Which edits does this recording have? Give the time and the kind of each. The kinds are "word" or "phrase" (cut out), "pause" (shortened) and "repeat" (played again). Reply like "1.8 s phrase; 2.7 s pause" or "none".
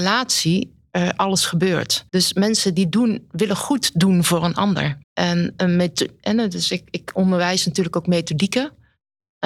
2.1 s pause; 5.0 s pause